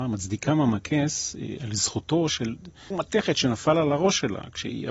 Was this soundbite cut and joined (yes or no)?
yes